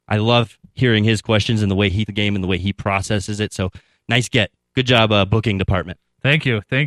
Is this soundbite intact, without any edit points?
no; 1 cut; at 2.1 s

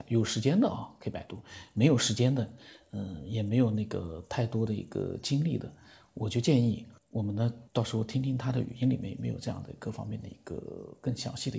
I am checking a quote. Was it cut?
yes; 2 cuts; at 7.0 s, 7.7 s

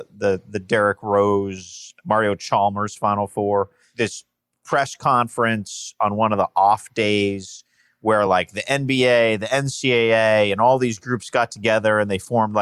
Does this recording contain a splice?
no; 0 cuts

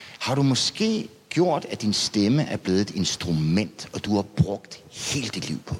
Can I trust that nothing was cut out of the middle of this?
yes; 0 cuts

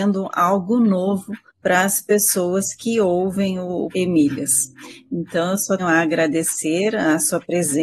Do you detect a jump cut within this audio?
yes; 3 cuts; at 1.5 s, 3.9 s, 5.8 s

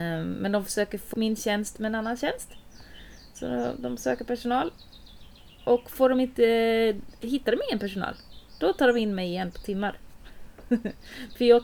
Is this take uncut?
no; 1 cut; at 1.1 s

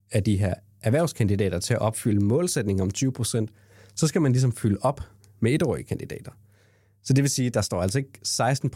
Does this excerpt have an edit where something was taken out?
no; 0 cuts

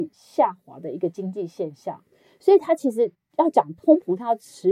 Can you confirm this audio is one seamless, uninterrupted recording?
yes; 0 cuts

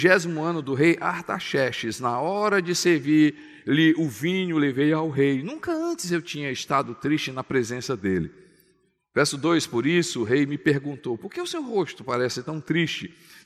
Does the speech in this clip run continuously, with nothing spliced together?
yes; 0 cuts

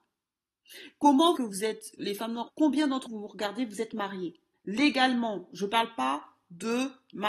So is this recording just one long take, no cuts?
no; 5 cuts; at 1.4 s, 2.0 s, 2.5 s, 3.1 s, 4.5 s

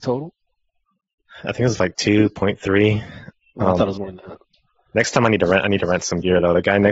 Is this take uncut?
yes; 0 cuts

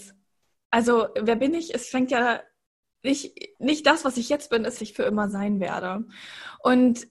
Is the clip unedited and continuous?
no; 1 cut; at 4.8 s

